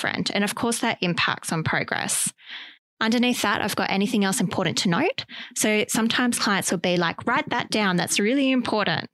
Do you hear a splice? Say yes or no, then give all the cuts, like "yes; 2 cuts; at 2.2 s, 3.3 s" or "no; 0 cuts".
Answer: no; 0 cuts